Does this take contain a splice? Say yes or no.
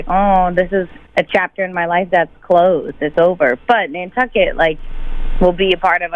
yes